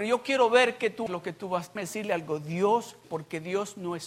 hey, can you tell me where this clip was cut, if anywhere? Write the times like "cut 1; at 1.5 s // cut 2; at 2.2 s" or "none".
cut 1; at 1.1 s // cut 2; at 1.8 s // cut 3; at 3.0 s